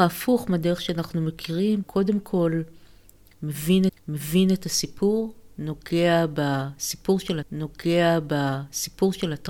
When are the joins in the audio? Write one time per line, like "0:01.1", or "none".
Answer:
0:01.8
0:03.9
0:07.4

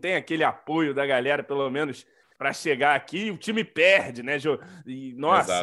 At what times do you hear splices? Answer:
none

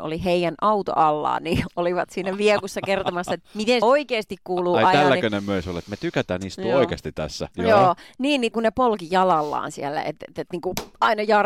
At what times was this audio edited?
0:03.8
0:07.5
0:08.5

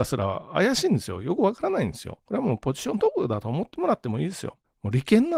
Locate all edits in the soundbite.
0:02.2

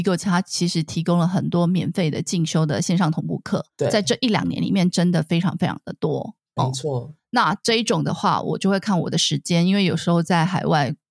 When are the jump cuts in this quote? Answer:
0:03.7

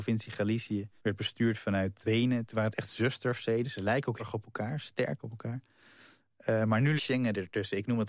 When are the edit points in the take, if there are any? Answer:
0:01.0
0:02.0
0:04.2
0:07.0

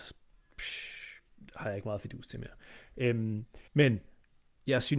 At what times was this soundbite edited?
0:03.7

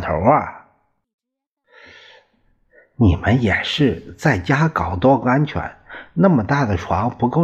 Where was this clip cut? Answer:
none

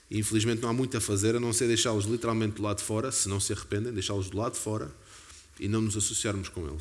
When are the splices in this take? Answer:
none

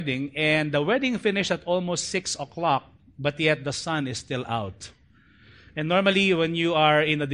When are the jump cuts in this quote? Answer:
none

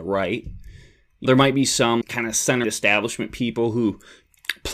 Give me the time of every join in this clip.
0:01.3
0:02.0
0:02.6

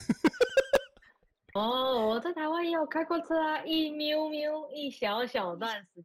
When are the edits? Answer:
0:01.6

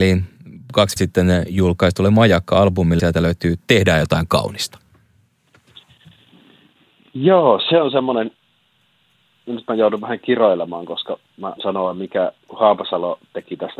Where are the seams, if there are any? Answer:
0:01.0
0:03.0
0:11.6

